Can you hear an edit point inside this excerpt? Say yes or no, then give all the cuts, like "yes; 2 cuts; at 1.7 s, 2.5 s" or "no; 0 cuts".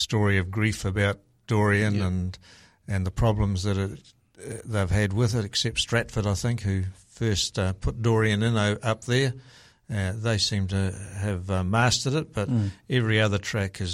no; 0 cuts